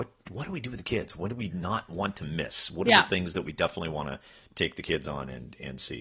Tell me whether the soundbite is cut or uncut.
uncut